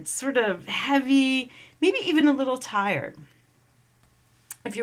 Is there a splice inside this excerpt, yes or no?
no